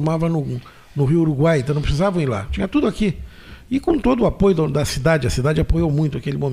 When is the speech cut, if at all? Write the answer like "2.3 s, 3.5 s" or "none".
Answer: none